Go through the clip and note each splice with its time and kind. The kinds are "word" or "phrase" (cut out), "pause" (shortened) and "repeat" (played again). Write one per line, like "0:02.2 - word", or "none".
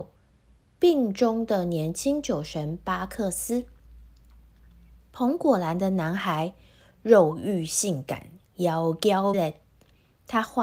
0:09.3 - word